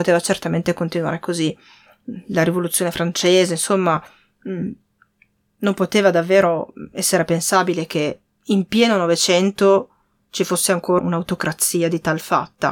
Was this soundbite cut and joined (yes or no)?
yes